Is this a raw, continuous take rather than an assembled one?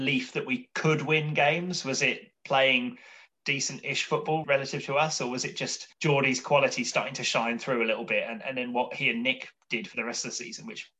no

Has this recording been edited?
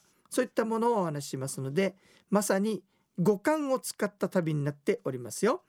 no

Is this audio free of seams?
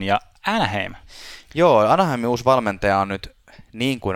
yes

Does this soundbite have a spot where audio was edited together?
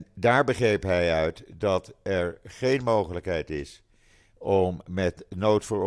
no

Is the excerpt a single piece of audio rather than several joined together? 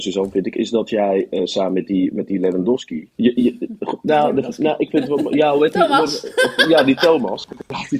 no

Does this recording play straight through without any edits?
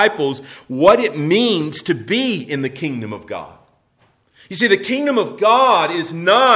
yes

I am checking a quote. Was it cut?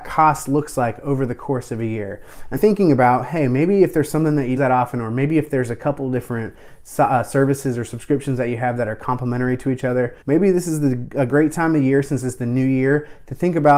yes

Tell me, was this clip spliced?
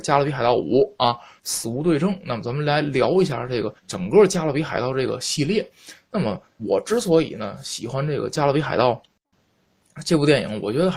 yes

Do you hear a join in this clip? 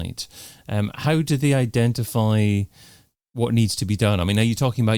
no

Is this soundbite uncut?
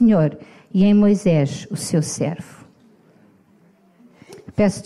yes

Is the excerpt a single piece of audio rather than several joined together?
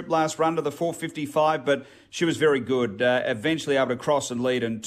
yes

